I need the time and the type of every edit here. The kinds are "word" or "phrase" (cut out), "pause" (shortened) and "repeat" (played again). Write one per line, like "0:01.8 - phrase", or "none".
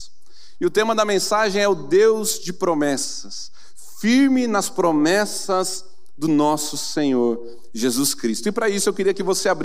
none